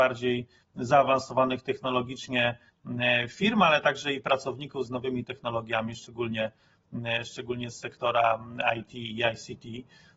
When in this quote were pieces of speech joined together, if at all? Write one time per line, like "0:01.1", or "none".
0:04.9